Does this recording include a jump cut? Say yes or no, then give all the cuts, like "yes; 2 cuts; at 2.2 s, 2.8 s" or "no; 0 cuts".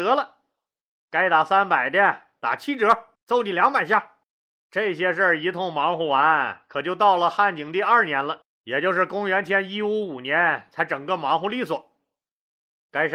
yes; 3 cuts; at 3.2 s, 4.2 s, 8.5 s